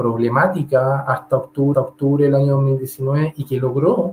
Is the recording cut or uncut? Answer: cut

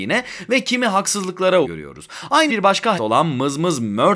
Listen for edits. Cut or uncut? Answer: cut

